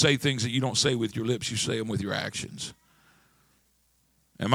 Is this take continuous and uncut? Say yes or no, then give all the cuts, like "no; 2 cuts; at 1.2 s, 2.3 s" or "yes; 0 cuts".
yes; 0 cuts